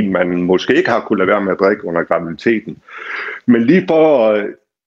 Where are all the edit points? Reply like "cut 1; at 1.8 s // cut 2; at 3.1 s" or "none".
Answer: none